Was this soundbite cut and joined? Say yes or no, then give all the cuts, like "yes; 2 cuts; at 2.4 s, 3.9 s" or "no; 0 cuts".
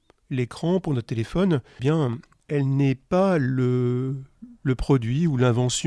yes; 1 cut; at 1.8 s